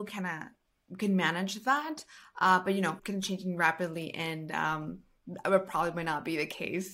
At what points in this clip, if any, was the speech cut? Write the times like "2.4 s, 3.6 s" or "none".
3.0 s

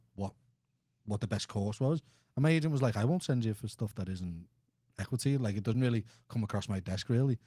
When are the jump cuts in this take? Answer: none

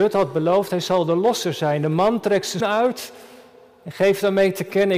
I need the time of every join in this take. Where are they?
2.6 s

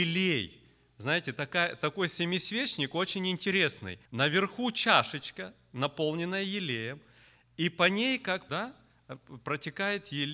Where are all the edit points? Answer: 4.0 s, 8.5 s

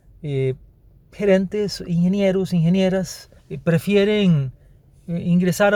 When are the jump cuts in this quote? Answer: 3.4 s

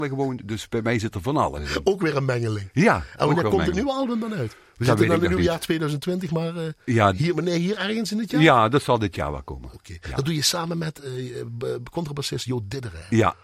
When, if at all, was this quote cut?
none

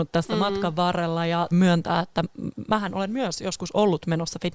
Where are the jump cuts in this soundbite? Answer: 1.5 s

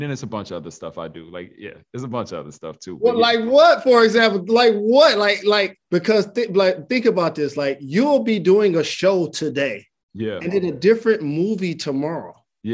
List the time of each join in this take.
5.8 s

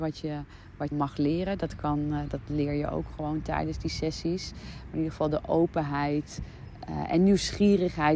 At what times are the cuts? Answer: 0.9 s

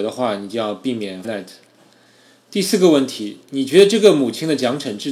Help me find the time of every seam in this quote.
1.2 s, 3.4 s

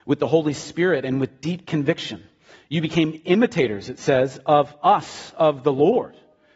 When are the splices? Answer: none

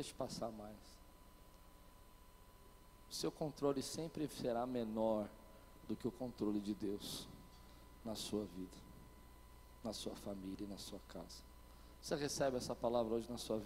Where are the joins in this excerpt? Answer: none

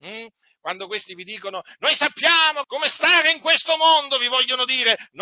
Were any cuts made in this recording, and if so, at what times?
2.6 s

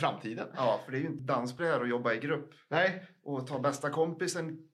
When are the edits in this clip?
1.2 s, 1.6 s

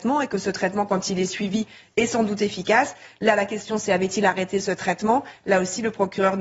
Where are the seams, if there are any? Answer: none

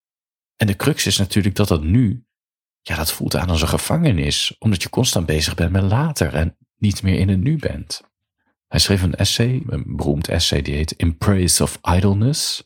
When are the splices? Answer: 8.4 s, 9.6 s

